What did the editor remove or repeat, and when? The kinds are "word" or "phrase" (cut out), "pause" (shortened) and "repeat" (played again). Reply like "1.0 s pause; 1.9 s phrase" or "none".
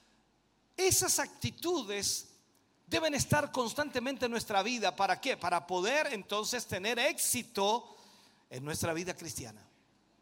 none

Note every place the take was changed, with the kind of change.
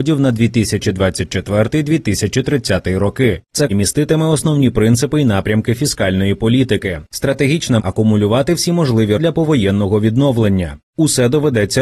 3.7 s phrase; 7.8 s word; 9.2 s word

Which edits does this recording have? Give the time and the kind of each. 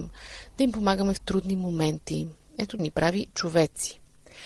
2.8 s word; 3.3 s word

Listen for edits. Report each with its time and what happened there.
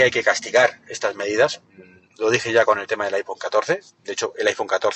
none

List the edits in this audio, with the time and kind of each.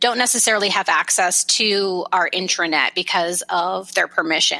none

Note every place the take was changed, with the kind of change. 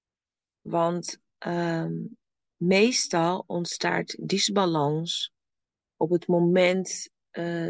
none

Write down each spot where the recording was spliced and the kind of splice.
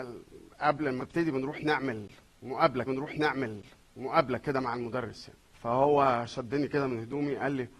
1.0 s word; 2.9 s repeat; 5.4 s pause

